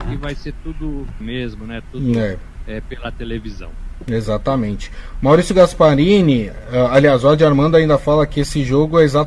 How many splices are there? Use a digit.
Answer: 1